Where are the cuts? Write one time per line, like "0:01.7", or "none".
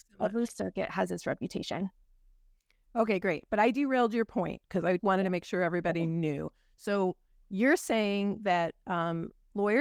0:05.0

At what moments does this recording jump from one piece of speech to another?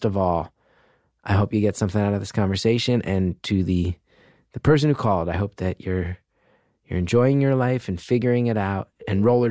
none

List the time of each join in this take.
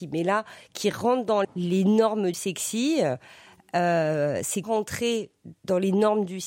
0:01.4
0:02.3
0:04.6

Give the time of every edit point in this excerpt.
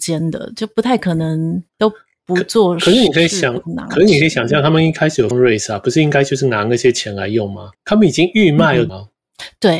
0:01.7
0:05.3
0:07.7
0:08.9

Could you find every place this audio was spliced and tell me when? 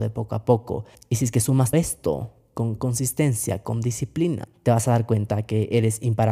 0:01.7

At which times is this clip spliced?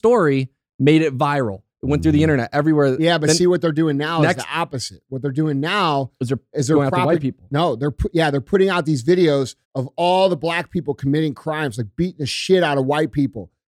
0:09.6

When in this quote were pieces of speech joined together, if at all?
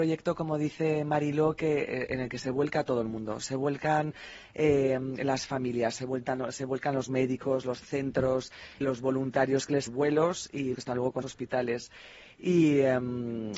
0:08.8
0:09.9
0:10.7
0:11.2

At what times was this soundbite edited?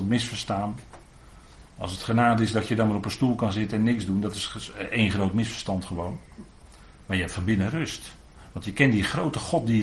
none

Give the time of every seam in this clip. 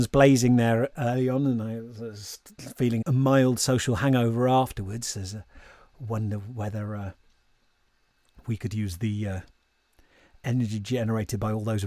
0:00.9
0:03.0

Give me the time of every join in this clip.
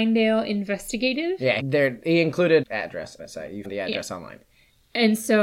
0:01.6
0:02.6
0:03.2
0:03.6

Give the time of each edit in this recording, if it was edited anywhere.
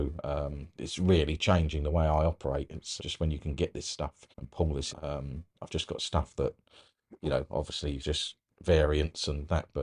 0:03.0
0:04.3
0:04.9
0:08.0

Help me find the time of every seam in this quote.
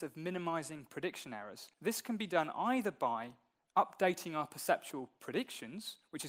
0:01.7

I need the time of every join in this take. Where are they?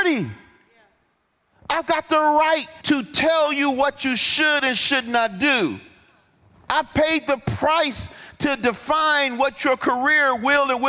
0:02.8

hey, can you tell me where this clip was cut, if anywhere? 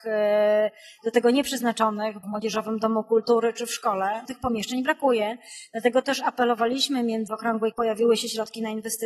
0:02.2
0:04.2
0:07.3
0:07.7

